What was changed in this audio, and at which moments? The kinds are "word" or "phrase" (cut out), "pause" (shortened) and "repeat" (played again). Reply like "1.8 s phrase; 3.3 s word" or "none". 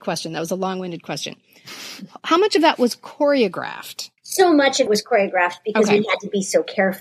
4.2 s pause; 4.9 s word